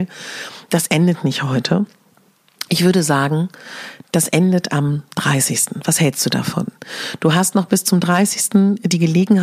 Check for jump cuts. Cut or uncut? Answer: uncut